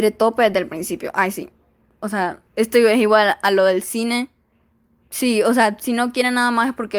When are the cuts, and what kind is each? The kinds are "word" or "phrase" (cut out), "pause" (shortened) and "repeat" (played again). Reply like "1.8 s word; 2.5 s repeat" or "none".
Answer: 2.5 s pause